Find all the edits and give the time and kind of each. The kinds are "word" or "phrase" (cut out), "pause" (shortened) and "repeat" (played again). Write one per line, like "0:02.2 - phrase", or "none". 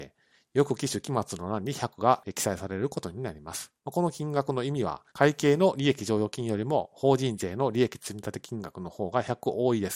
0:03.8 - pause
0:05.1 - pause